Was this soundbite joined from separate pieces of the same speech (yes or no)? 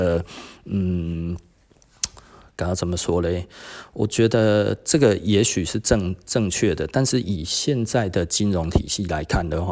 no